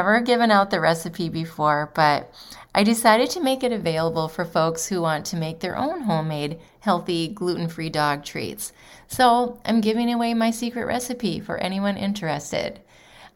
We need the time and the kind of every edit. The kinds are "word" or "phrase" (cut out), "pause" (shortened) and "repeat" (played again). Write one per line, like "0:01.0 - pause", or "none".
none